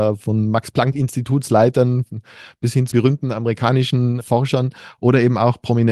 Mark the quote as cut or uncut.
cut